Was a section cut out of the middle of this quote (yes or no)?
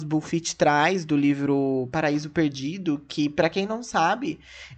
no